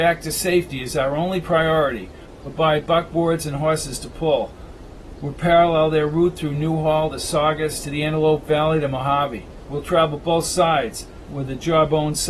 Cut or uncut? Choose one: uncut